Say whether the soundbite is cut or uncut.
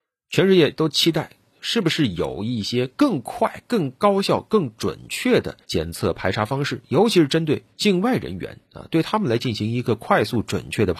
cut